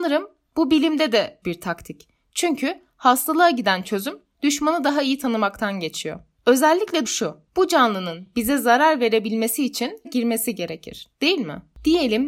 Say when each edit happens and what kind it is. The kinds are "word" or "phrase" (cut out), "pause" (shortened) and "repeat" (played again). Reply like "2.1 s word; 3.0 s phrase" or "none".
1.4 s word; 7.0 s word; 10.0 s word